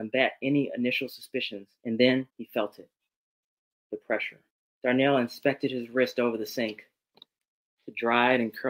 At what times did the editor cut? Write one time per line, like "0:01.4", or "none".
0:01.8
0:02.3
0:04.5